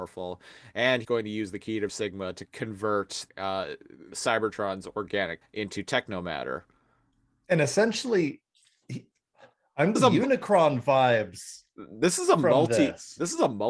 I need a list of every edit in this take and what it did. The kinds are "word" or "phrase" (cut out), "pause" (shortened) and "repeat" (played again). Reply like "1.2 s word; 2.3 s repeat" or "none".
1.0 s word; 1.9 s word; 2.4 s word; 3.3 s word; 4.1 s word; 5.4 s word; 10.0 s word